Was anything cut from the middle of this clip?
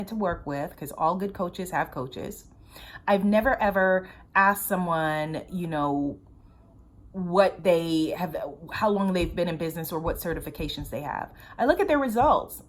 no; 0 cuts

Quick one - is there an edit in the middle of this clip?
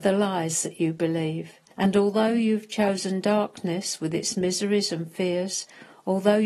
yes; 1 cut; at 1.7 s

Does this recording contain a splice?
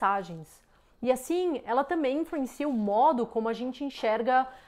no; 0 cuts

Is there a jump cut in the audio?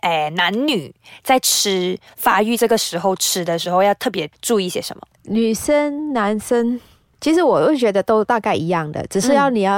no; 0 cuts

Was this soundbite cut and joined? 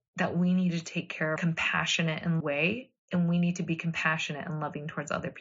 yes; 2 cuts; at 1.4 s, 2.4 s

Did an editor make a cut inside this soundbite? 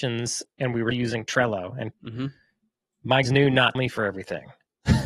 yes; 4 cuts; at 0.9 s, 1.9 s, 3.2 s, 3.7 s

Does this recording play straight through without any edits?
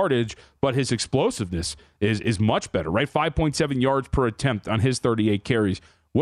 yes; 0 cuts

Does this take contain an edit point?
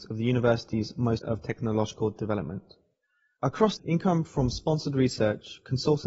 yes; 2 cuts; at 1.2 s, 3.8 s

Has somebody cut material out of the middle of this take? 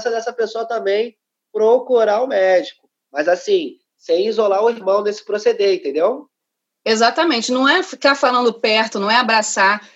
no; 0 cuts

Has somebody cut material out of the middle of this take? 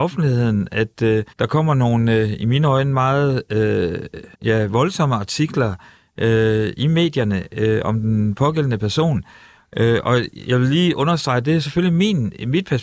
yes; 2 cuts; at 1.3 s, 4.3 s

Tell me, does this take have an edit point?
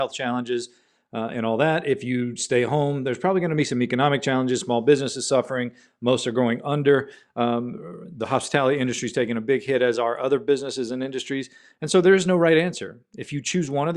no; 0 cuts

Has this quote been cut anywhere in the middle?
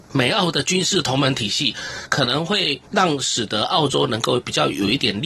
yes; 1 cut; at 2.9 s

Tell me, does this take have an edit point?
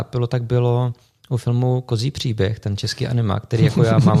no; 0 cuts

